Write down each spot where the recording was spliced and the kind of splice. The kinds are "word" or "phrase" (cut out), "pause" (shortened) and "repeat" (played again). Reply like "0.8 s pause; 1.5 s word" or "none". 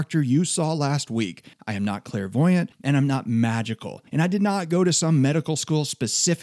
1.5 s pause; 2.7 s pause; 4.1 s pause